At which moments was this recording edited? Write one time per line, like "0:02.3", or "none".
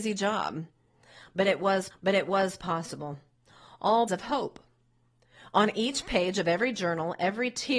0:01.9
0:04.1

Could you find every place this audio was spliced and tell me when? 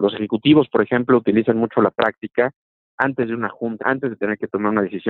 0:03.8

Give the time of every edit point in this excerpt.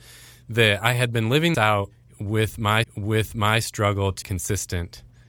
0:01.5
0:02.8
0:04.2

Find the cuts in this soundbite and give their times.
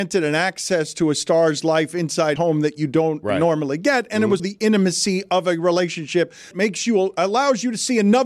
0:02.4
0:04.4
0:06.5

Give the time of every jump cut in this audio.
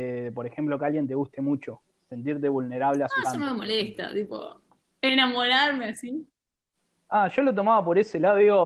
0:03.2
0:04.8

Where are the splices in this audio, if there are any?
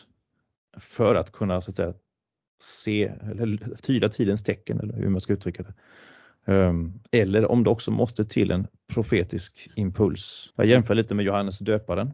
0:10.5

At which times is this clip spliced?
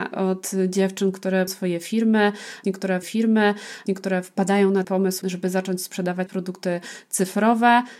0:01.5
0:03.0
0:04.8
0:05.2
0:06.3

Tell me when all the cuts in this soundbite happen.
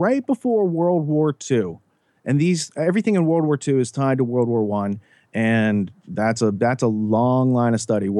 none

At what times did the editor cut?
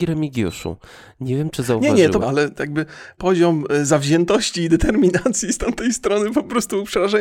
0:02.2
0:03.2

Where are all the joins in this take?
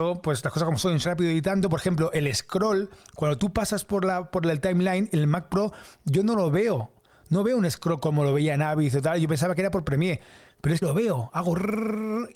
0:01.0
0:10.8

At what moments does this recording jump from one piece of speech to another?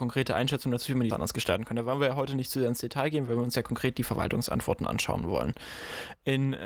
0:01.1

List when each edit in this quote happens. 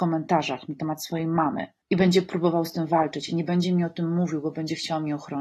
0:01.8

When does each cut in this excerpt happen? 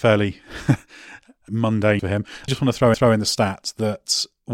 0:01.5
0:02.0
0:02.5
0:02.9

